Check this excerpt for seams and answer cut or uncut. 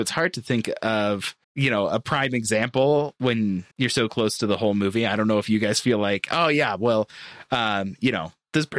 cut